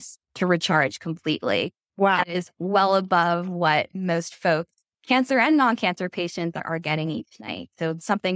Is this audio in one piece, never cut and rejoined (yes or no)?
yes